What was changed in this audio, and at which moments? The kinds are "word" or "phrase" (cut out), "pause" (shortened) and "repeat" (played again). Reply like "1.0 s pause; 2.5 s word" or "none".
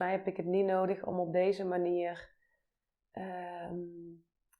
none